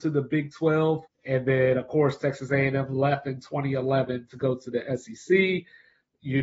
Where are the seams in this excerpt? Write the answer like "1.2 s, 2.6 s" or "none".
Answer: 1.1 s